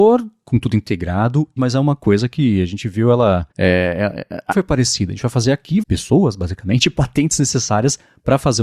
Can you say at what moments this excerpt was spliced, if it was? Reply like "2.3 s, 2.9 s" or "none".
1.6 s, 3.5 s, 4.5 s, 5.8 s